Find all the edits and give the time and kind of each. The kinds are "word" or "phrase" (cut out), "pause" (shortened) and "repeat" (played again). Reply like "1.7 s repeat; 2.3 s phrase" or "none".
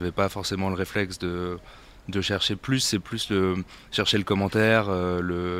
none